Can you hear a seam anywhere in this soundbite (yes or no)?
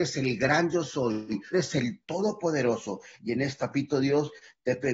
yes